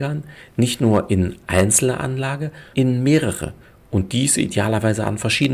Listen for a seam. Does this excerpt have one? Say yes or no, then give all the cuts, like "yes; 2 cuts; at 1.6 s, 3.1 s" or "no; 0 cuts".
yes; 2 cuts; at 1.4 s, 2.7 s